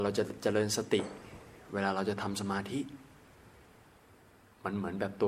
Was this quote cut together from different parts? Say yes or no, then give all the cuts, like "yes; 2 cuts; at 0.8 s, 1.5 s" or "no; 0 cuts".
no; 0 cuts